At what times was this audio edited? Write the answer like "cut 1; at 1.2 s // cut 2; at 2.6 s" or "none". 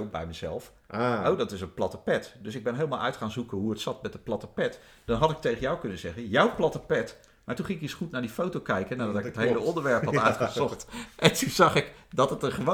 none